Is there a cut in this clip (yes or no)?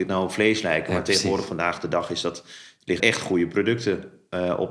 yes